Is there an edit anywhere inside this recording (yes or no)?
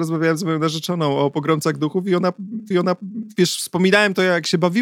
yes